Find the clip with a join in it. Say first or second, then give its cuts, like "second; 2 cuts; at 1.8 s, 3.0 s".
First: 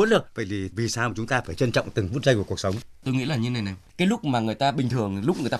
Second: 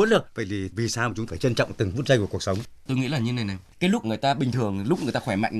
second; 2 cuts; at 1.3 s, 4.0 s